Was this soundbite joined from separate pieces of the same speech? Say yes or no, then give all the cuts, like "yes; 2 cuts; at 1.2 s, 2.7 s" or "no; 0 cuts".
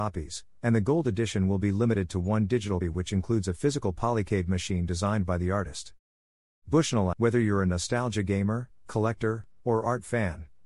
yes; 2 cuts; at 2.8 s, 7.1 s